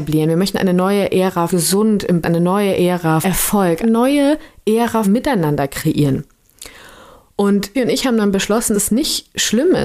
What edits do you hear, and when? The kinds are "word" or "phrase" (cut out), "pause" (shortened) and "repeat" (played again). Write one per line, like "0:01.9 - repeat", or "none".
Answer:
0:01.5 - word
0:02.2 - word
0:03.2 - word
0:03.8 - word
0:05.0 - word
0:07.7 - word
0:08.7 - word